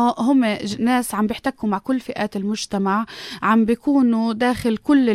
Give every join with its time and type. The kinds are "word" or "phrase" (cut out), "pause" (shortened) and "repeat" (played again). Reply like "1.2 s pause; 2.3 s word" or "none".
none